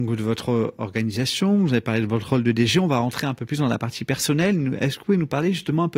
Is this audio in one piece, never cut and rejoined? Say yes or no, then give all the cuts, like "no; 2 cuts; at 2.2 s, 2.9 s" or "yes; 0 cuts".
yes; 0 cuts